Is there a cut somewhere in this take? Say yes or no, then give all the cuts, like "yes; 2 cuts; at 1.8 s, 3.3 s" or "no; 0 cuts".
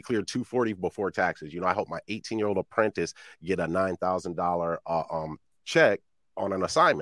no; 0 cuts